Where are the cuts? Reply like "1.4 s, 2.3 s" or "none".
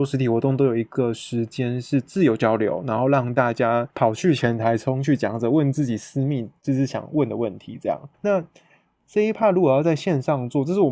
3.9 s, 8.1 s